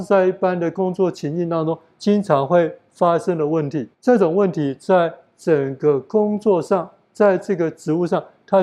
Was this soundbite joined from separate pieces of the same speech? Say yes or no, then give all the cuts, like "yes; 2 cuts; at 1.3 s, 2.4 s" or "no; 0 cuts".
yes; 1 cut; at 3.9 s